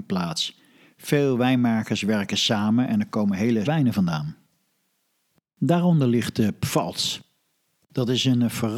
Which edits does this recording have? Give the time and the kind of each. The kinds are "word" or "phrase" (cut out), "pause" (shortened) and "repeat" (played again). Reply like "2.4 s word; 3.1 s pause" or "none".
3.7 s word